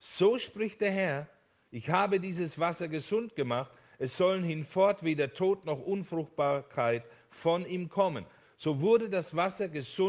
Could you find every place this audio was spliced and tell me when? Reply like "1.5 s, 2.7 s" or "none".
none